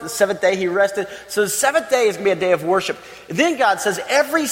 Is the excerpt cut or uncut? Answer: uncut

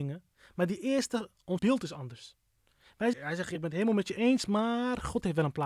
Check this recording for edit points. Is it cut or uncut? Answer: cut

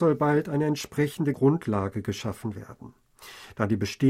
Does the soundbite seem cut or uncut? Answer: cut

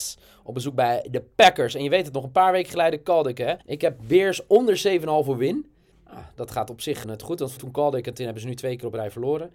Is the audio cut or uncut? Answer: cut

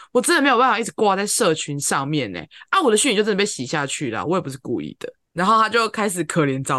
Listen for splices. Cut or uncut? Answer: uncut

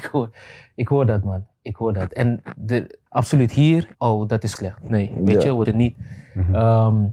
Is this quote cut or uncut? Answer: cut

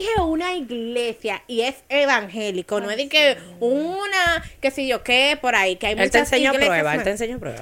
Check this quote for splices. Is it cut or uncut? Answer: uncut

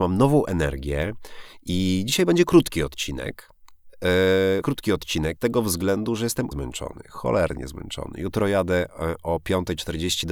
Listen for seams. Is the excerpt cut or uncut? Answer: cut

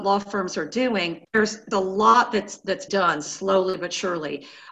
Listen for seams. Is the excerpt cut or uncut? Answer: cut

